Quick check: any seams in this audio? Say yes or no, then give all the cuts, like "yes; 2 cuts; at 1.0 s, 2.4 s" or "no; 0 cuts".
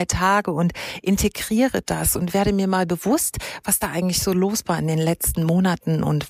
no; 0 cuts